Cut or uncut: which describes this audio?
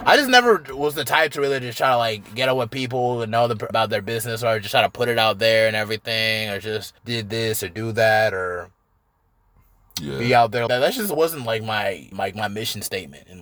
cut